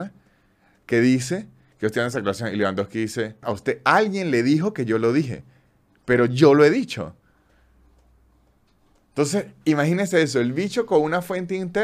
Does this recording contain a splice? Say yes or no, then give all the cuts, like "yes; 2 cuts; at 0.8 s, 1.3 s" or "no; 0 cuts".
yes; 1 cut; at 3.4 s